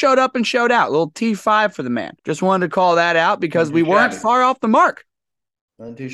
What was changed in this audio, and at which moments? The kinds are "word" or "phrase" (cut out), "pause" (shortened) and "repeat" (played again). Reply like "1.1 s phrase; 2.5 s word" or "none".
2.2 s pause